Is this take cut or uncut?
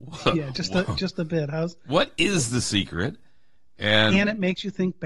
uncut